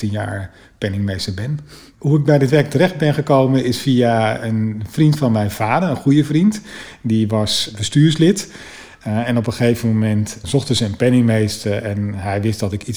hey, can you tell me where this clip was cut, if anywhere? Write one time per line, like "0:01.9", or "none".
0:10.4